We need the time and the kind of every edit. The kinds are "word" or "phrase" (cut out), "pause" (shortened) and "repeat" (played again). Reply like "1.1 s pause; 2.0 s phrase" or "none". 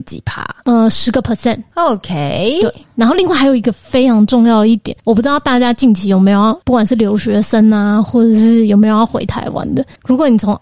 5.0 s pause; 6.6 s pause

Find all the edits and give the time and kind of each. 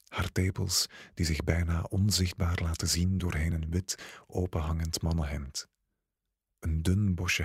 none

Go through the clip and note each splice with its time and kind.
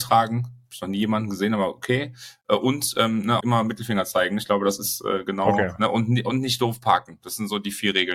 3.4 s word

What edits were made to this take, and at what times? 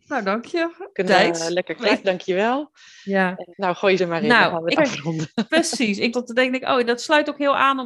1.1 s word; 2.0 s word; 3.5 s word; 4.0 s word; 4.7 s word; 6.1 s word

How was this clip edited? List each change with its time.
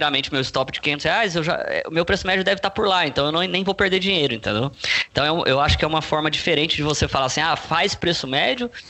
none

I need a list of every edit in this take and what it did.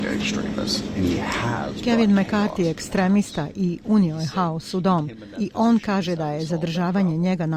none

